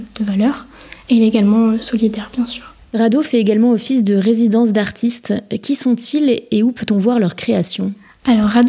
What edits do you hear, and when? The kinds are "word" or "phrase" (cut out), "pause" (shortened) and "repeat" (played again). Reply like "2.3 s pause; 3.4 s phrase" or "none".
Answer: none